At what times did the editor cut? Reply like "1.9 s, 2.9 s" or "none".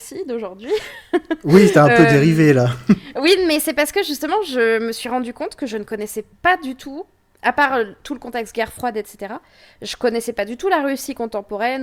none